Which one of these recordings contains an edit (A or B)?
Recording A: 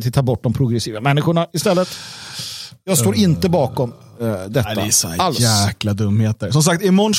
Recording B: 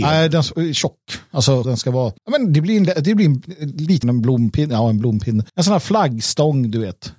B